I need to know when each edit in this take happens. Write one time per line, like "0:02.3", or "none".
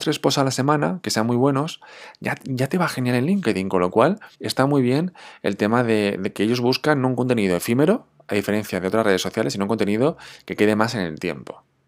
0:04.3